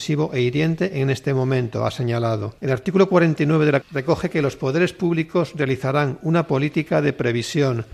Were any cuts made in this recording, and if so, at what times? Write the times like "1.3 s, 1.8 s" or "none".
2.6 s, 3.8 s